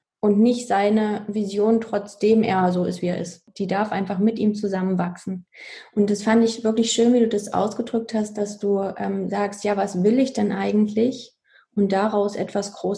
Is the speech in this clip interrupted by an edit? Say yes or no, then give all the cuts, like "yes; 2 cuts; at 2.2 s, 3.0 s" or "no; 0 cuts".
no; 0 cuts